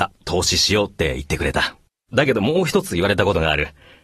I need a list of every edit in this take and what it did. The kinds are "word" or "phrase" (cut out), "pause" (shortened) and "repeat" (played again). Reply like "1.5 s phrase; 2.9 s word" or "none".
1.9 s pause